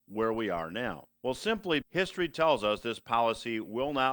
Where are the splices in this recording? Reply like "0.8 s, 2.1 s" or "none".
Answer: 1.1 s, 1.8 s